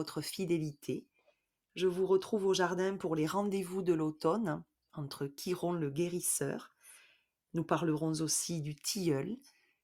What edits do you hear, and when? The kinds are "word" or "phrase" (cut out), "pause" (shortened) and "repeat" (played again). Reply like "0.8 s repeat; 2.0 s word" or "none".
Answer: none